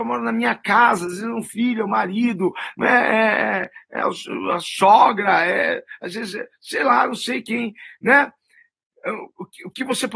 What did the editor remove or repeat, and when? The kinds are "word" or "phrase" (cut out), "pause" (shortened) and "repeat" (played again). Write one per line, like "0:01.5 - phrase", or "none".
none